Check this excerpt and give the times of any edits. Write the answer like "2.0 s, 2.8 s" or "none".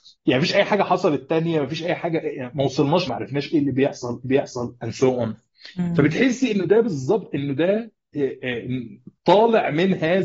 3.1 s, 4.2 s